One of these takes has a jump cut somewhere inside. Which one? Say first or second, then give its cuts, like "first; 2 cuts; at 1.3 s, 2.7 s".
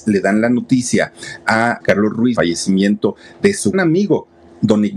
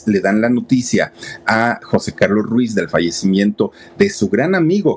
first; 3 cuts; at 1.8 s, 2.4 s, 3.7 s